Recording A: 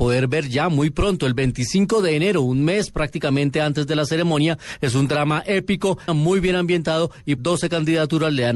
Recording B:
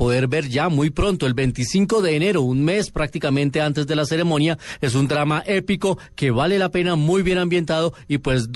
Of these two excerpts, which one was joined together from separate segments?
A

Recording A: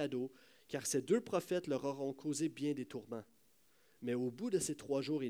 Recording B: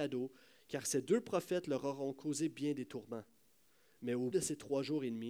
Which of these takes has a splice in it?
B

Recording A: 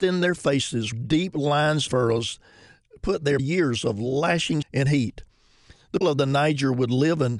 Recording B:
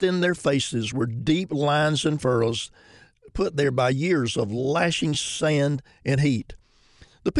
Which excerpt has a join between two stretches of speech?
A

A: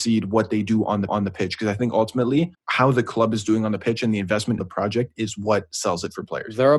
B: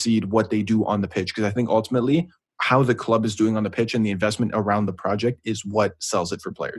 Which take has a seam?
A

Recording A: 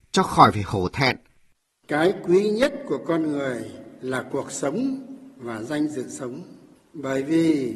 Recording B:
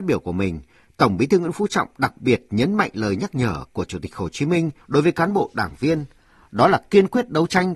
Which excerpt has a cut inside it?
B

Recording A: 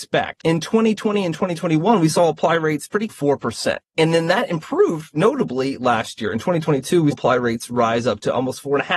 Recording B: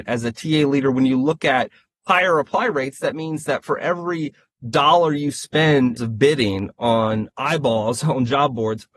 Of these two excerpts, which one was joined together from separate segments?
A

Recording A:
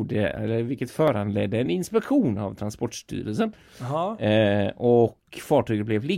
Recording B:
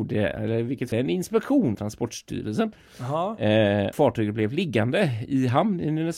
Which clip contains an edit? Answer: B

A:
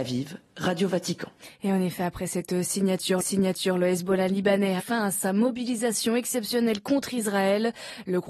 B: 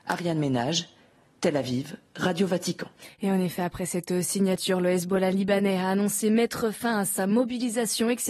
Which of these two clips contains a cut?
A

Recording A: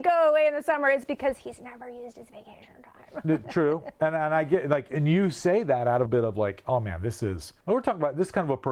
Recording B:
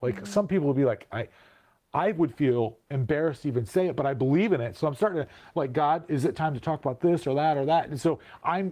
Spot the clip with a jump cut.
A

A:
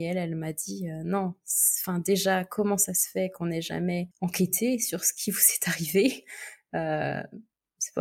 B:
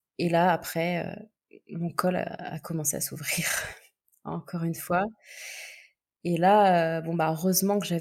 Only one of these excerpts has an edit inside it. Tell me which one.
A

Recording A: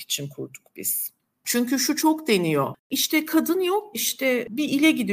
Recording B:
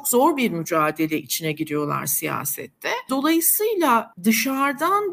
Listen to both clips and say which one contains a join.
A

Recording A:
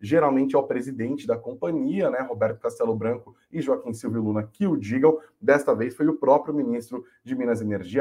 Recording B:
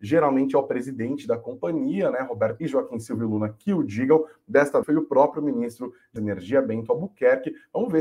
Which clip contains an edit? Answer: B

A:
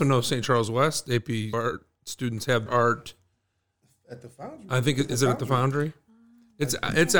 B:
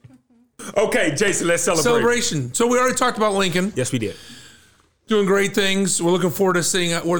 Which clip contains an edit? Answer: A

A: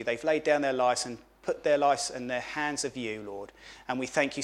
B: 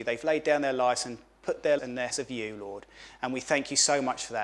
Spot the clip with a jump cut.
B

